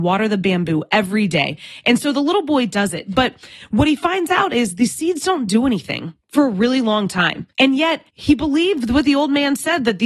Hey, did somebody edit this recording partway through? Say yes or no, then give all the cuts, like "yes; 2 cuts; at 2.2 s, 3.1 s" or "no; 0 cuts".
yes; 3 cuts; at 6.2 s, 7.5 s, 8.1 s